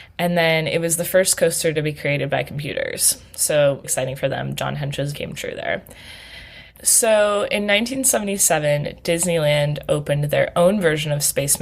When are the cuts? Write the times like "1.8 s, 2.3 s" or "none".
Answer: 3.8 s, 5.1 s